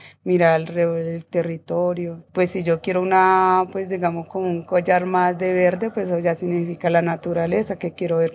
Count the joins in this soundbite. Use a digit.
1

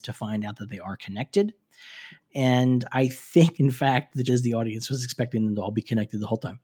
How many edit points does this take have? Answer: 2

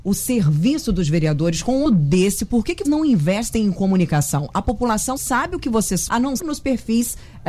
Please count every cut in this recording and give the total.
5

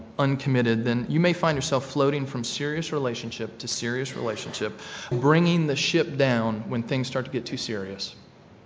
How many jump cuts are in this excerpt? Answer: 1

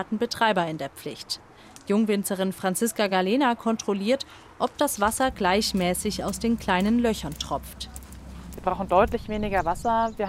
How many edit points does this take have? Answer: 0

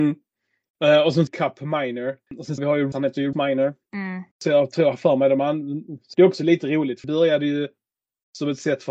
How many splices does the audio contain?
8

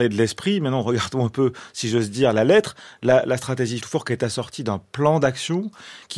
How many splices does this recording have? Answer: 1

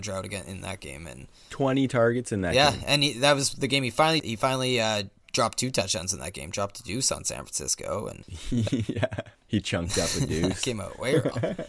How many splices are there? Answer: 1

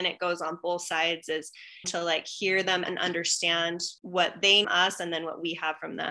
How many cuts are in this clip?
4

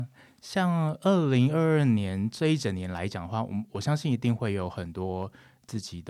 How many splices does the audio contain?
0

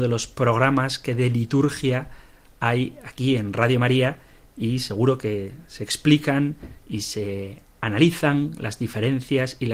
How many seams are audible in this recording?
1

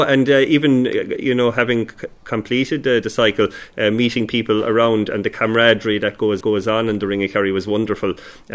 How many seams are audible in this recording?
1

